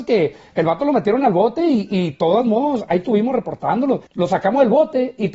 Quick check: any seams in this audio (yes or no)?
yes